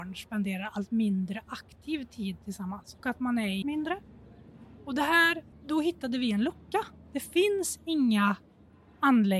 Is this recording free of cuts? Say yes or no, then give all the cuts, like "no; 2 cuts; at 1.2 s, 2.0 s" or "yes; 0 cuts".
no; 3 cuts; at 3.0 s, 3.6 s, 5.5 s